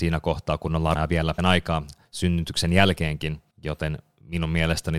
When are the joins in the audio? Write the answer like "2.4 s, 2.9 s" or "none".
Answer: 0.9 s, 1.4 s, 3.5 s